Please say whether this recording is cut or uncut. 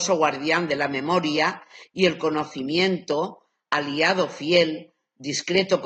uncut